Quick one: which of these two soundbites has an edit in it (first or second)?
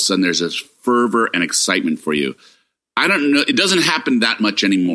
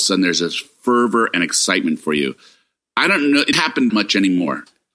second